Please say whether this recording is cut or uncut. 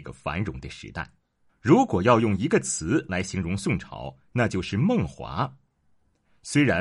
cut